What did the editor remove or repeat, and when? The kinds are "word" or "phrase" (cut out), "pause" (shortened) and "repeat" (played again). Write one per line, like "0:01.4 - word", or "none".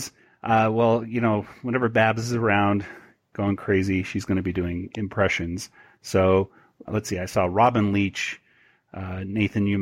0:06.9 - word